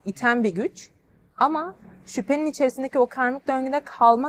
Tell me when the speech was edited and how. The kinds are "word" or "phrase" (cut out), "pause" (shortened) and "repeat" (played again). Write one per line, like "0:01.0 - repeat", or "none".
none

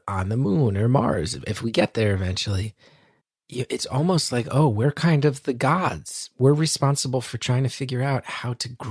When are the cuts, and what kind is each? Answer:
0:03.2 - pause

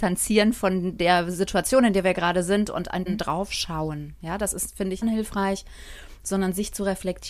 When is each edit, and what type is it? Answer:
0:03.1 - word
0:05.0 - phrase

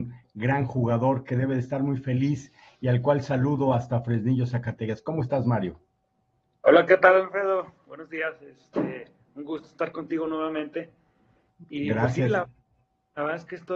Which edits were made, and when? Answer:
none

